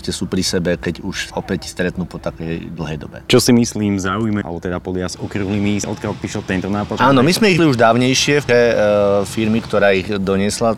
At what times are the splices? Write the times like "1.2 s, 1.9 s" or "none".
1.3 s, 3.3 s, 4.4 s, 5.8 s, 7.6 s, 8.5 s